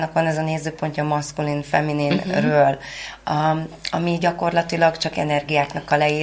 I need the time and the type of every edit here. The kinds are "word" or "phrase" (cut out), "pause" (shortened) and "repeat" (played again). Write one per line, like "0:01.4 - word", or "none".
none